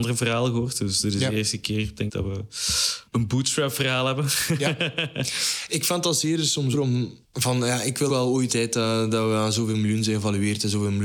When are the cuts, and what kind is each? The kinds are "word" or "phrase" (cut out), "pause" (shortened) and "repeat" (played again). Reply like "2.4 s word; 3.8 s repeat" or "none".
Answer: 2.1 s word; 3.1 s pause; 5.7 s word; 6.7 s word; 7.2 s pause; 8.1 s word; 8.5 s phrase